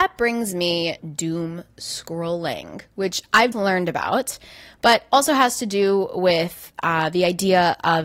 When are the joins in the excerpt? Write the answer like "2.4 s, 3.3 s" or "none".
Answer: 1.0 s, 3.5 s

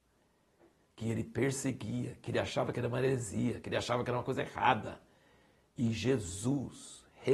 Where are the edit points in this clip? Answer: none

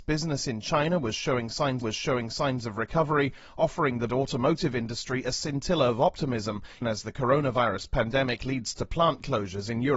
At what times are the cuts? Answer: 1.8 s, 4.1 s, 6.8 s

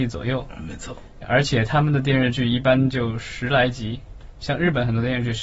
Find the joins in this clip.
1.2 s

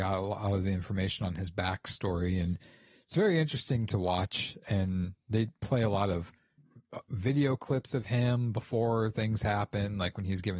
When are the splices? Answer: none

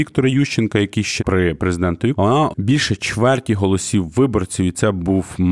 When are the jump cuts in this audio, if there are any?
1.2 s, 2.1 s, 2.5 s

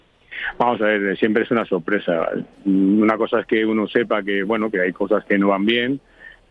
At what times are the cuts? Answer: none

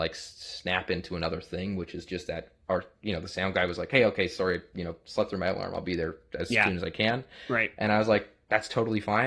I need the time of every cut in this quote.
none

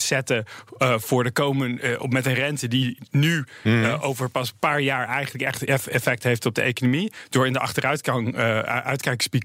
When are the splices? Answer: none

